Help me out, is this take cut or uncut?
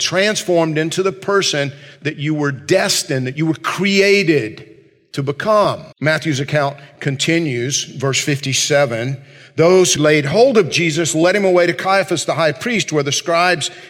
cut